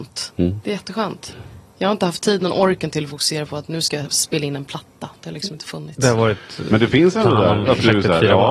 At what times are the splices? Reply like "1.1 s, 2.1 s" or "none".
none